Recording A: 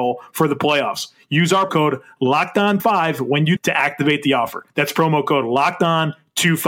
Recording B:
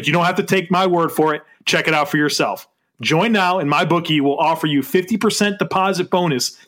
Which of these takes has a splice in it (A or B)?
A